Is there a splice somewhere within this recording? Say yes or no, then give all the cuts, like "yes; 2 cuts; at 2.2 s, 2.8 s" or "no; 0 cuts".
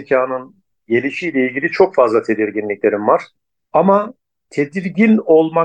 no; 0 cuts